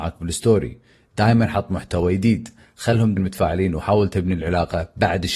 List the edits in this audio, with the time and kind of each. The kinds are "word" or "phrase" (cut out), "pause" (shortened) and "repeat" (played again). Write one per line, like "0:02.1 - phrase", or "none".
0:03.2 - word